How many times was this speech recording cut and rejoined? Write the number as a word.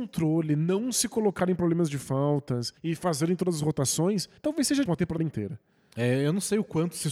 four